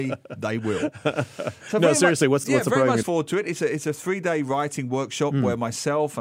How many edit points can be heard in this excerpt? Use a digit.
2